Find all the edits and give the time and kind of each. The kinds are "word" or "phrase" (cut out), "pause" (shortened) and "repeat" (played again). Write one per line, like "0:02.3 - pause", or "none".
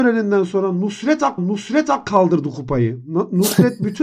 0:01.4 - repeat